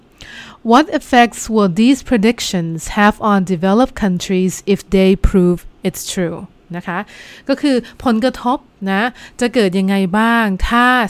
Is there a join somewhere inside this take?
no; 0 cuts

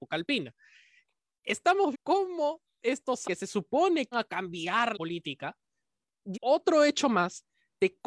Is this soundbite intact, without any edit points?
no; 5 cuts; at 1.9 s, 3.2 s, 4.1 s, 4.9 s, 6.3 s

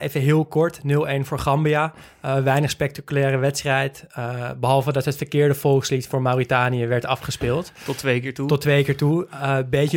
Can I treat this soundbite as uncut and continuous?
yes; 0 cuts

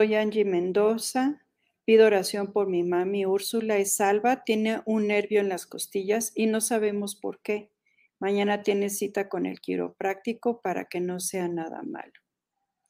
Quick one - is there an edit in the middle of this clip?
no; 0 cuts

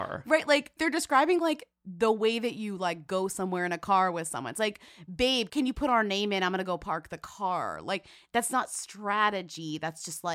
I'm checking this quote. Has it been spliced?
no; 0 cuts

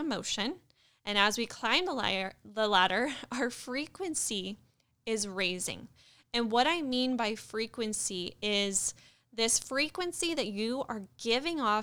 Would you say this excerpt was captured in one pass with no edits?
yes; 0 cuts

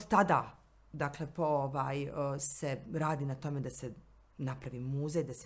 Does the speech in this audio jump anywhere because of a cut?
no; 0 cuts

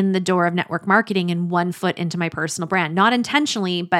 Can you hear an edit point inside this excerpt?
no; 0 cuts

